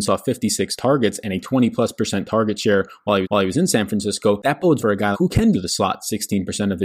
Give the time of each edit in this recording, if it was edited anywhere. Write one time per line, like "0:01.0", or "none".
0:03.2
0:04.8
0:05.1
0:05.5